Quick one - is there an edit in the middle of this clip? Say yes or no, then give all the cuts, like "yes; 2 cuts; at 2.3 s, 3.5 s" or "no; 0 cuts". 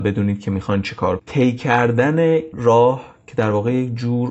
yes; 2 cuts; at 1.2 s, 2.5 s